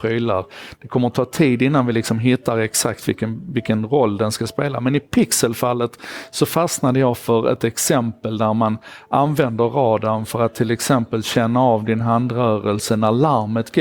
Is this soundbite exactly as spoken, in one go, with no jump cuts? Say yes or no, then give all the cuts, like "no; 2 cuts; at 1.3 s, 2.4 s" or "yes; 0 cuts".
yes; 0 cuts